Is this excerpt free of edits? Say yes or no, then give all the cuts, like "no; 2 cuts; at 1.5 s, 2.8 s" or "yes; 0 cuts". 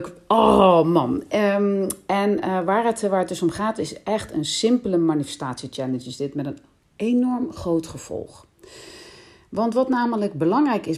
yes; 0 cuts